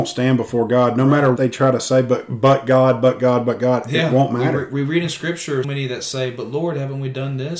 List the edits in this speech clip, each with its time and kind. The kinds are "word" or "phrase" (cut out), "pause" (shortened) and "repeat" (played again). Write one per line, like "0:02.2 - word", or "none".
0:01.4 - word
0:05.6 - word